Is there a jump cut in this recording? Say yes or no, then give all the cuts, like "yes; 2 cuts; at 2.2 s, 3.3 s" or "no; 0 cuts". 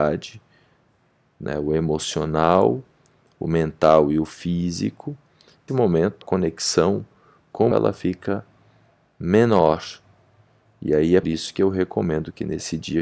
yes; 4 cuts; at 5.7 s, 6.2 s, 7.7 s, 11.2 s